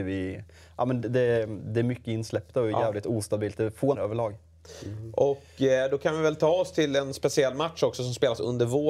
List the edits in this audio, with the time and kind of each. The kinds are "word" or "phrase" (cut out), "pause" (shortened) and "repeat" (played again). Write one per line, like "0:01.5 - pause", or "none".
0:03.9 - word